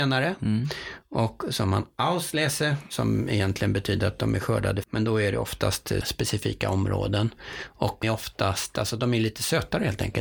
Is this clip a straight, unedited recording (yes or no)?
no